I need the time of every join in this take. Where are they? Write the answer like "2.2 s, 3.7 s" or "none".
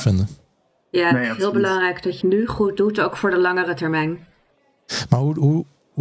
2.2 s